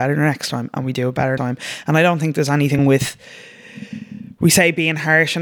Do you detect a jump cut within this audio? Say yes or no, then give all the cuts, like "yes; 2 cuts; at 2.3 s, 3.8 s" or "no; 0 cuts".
yes; 2 cuts; at 1.4 s, 2.8 s